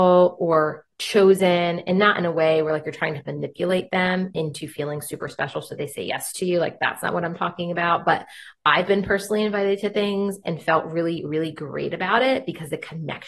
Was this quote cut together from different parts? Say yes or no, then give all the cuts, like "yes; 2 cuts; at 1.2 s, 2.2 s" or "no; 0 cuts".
no; 0 cuts